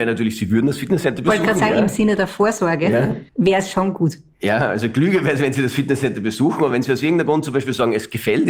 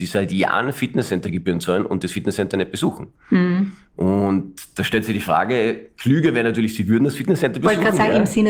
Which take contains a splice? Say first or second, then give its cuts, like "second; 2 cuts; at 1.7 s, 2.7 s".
first; 1 cut; at 3.3 s